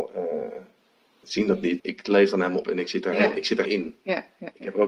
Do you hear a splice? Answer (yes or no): yes